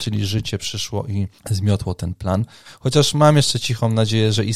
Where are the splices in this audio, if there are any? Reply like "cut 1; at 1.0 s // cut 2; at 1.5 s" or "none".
cut 1; at 1.4 s